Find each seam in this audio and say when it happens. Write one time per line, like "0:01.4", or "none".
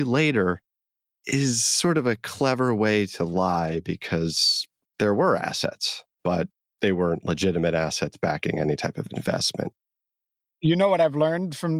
0:04.8
0:06.1